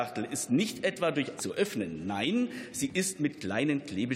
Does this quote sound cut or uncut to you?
cut